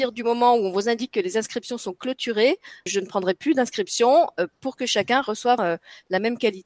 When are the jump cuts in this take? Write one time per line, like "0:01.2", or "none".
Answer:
0:02.9
0:05.6